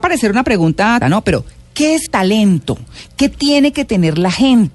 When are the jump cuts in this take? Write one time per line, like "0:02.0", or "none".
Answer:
0:01.0
0:02.1